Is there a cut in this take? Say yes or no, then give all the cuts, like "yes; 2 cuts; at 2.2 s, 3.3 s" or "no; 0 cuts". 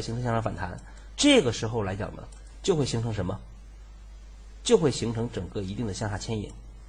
yes; 1 cut; at 1.1 s